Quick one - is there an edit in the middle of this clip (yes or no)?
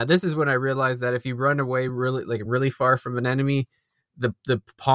no